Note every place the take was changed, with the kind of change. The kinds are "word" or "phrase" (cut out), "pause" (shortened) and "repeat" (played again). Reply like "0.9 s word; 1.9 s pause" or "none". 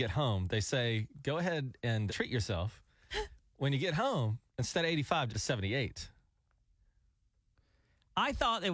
2.1 s word; 4.5 s pause; 5.3 s phrase